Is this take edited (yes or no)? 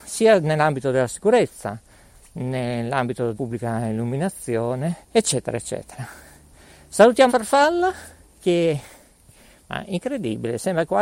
yes